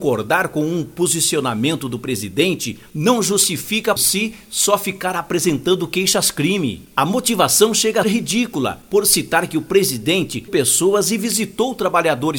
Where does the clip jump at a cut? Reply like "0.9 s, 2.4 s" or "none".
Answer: 4.0 s, 8.0 s, 10.5 s